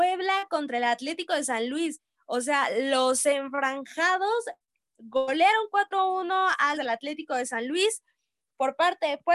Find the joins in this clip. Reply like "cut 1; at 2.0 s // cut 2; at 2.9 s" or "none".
cut 1; at 6.7 s